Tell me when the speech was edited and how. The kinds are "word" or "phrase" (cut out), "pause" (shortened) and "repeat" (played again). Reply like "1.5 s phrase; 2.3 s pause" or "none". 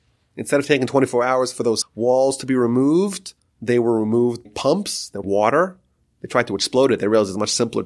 1.8 s word; 3.4 s pause; 4.4 s word; 5.2 s word